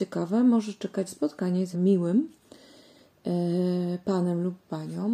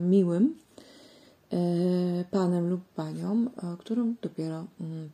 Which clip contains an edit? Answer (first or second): first